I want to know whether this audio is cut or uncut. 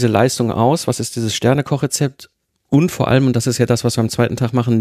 uncut